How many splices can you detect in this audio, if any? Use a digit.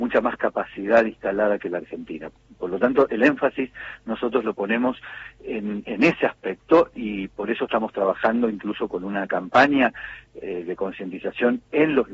0